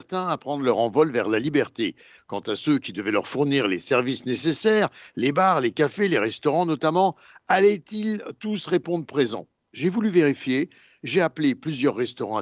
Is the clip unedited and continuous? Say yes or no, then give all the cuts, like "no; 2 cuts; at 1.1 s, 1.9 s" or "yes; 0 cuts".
yes; 0 cuts